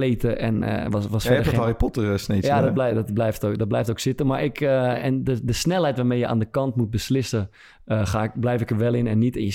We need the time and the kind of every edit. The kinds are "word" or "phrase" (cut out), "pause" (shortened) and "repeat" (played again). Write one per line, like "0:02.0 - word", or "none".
none